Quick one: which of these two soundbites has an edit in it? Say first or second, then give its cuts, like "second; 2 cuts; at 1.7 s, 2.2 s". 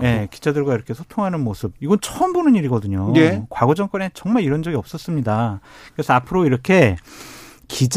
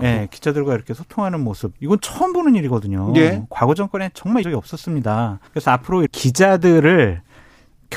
second; 3 cuts; at 4.4 s, 5.5 s, 6.1 s